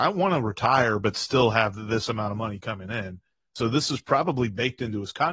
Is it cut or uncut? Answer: uncut